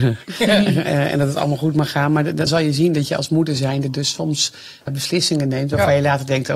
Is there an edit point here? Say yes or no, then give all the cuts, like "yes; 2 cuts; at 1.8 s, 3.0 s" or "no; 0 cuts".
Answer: yes; 2 cuts; at 2.5 s, 4.9 s